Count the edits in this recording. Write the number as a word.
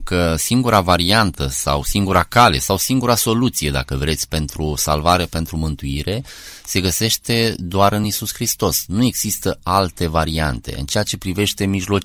zero